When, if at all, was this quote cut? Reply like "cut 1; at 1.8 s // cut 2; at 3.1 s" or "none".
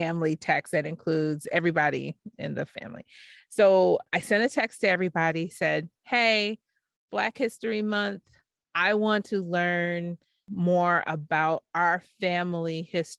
none